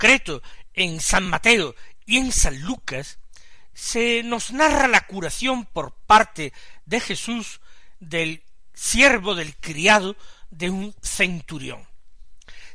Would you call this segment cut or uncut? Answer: uncut